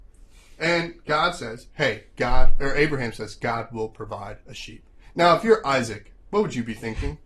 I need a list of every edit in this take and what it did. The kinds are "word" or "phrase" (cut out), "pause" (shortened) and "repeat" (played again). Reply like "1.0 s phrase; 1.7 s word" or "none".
none